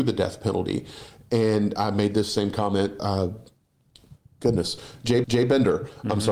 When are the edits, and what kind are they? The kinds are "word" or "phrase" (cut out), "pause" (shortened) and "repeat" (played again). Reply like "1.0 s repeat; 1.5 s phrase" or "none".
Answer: 3.0 s word; 5.2 s repeat